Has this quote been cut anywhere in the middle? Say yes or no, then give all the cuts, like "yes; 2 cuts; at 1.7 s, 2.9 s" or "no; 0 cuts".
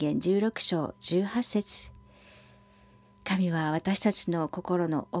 no; 0 cuts